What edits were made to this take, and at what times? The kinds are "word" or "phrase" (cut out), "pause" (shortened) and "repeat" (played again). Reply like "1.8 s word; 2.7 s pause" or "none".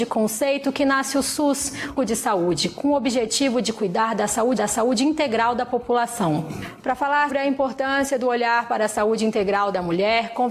2.0 s phrase; 4.6 s repeat; 7.3 s word